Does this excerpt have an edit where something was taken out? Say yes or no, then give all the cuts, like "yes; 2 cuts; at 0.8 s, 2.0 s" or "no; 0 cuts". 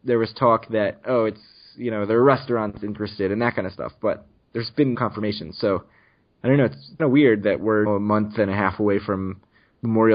yes; 3 cuts; at 4.9 s, 7.0 s, 7.9 s